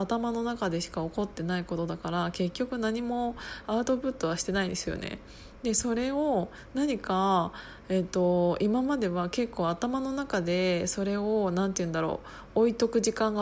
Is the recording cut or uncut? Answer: uncut